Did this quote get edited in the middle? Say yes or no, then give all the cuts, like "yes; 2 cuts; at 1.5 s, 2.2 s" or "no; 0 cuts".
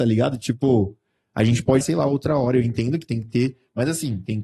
yes; 1 cut; at 1.8 s